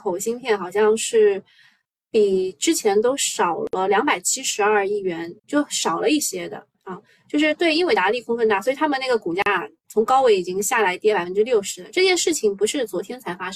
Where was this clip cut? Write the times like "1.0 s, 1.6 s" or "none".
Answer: 5.4 s, 6.7 s